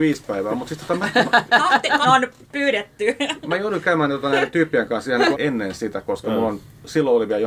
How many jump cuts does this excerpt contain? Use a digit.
2